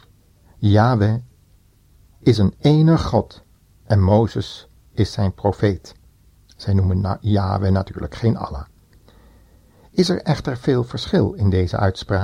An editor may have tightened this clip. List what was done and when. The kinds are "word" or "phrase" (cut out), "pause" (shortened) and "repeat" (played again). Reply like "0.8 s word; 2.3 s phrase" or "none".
none